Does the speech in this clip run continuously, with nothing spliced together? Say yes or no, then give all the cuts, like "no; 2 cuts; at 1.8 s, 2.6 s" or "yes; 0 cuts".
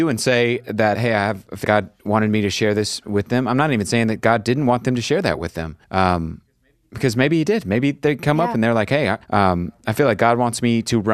no; 4 cuts; at 0.9 s, 1.6 s, 5.8 s, 9.2 s